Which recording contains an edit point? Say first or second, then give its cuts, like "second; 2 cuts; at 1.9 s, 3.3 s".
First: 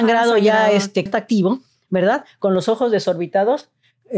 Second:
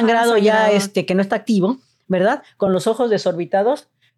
first; 1 cut; at 1.1 s